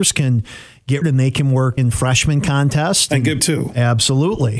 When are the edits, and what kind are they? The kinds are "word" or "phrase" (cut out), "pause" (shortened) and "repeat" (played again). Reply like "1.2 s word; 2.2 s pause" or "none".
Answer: 1.0 s word; 1.8 s word; 3.4 s word